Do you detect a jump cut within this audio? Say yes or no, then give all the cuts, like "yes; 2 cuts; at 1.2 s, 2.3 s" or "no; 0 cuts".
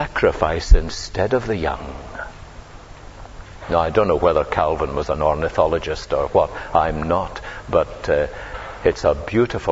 no; 0 cuts